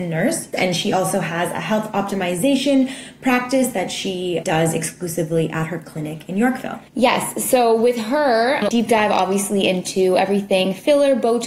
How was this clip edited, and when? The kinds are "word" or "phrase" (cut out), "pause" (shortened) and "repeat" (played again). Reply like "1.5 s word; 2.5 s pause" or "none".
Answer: 6.9 s pause; 8.7 s word